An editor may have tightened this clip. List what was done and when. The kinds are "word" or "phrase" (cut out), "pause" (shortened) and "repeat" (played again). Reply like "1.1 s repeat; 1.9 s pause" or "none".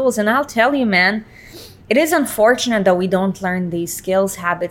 1.8 s pause